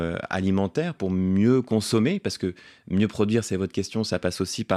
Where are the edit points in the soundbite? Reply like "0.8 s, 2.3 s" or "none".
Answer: none